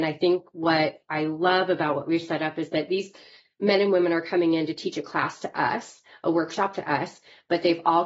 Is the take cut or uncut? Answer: uncut